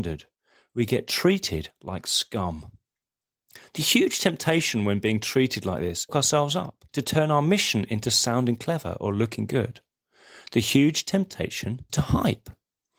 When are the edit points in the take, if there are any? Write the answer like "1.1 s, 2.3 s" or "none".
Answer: 6.1 s, 6.9 s, 11.9 s